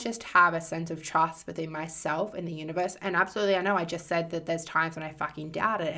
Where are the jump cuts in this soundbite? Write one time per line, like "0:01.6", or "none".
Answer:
none